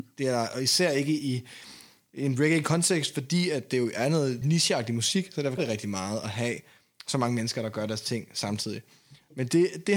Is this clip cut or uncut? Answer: cut